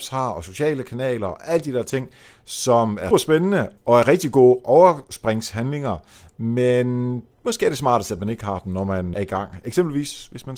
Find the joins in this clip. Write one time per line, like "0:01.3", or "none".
0:03.1
0:09.1